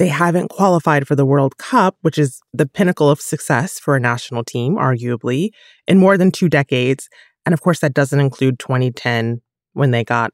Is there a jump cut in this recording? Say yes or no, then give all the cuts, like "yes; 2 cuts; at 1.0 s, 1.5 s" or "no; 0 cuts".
yes; 1 cut; at 2.5 s